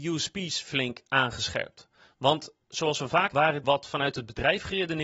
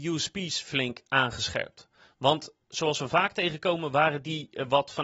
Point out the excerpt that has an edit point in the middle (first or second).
first